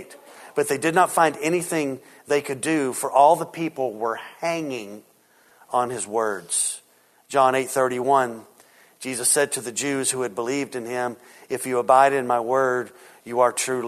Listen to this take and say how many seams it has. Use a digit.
0